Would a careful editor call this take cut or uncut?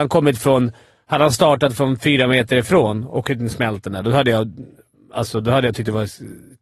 uncut